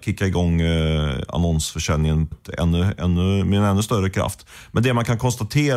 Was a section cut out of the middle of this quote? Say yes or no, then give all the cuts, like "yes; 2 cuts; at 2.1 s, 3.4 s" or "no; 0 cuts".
yes; 1 cut; at 2.3 s